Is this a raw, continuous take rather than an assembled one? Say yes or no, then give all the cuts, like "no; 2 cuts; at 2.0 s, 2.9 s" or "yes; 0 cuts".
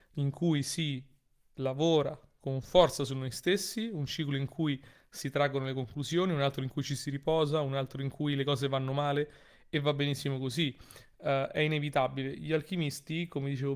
yes; 0 cuts